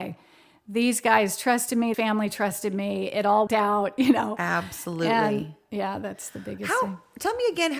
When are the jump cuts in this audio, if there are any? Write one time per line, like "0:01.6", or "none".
0:01.9
0:03.5